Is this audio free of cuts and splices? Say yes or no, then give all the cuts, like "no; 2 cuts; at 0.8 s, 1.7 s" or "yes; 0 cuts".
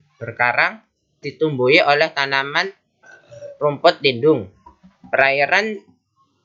no; 1 cut; at 1.2 s